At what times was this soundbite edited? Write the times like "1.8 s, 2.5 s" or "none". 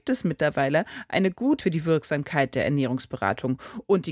1.6 s